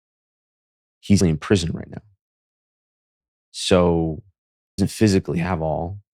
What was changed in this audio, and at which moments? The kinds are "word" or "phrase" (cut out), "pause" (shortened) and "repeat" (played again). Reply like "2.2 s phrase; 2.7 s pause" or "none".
1.2 s word; 4.8 s word